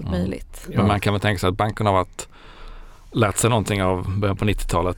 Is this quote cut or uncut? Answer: uncut